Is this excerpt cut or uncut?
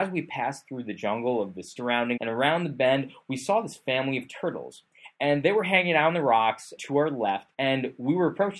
cut